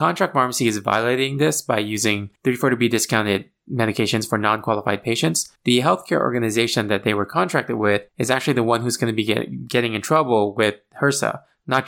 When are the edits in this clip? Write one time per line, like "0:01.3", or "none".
0:02.4
0:05.6
0:08.1